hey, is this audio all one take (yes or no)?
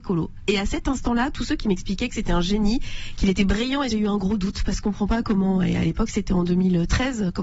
no